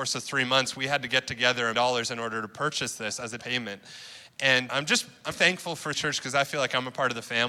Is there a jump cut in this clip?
yes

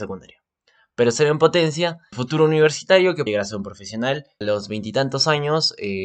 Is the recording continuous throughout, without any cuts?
no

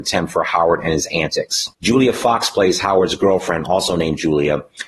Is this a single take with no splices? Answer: no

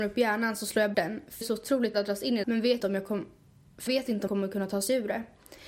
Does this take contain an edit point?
yes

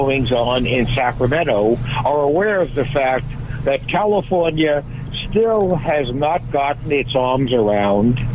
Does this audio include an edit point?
no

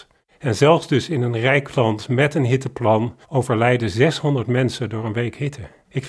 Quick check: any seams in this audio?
yes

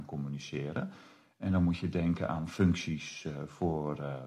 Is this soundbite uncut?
yes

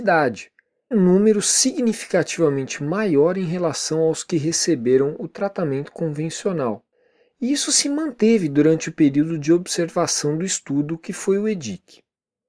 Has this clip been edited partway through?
yes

